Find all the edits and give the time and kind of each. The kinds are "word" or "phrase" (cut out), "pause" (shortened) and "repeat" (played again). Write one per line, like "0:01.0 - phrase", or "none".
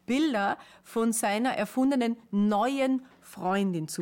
none